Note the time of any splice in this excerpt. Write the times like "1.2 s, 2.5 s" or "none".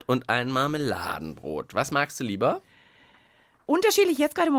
none